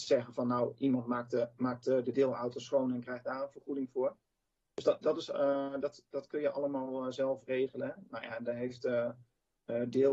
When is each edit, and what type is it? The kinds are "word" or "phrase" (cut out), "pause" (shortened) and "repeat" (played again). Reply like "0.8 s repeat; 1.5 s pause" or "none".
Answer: none